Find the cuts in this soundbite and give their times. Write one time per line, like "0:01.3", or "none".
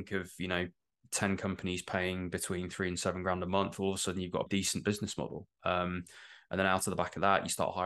0:04.5

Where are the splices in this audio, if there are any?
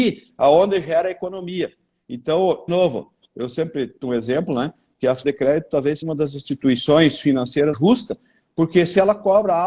0:02.7
0:04.0
0:05.2
0:06.0
0:07.7

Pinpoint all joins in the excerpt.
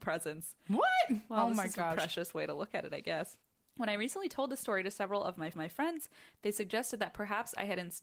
0:05.5

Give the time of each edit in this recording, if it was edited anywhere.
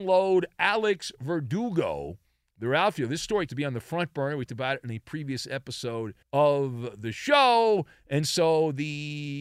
0:03.5
0:04.5
0:06.2

